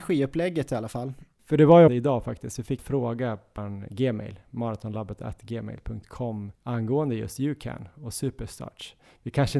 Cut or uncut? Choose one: cut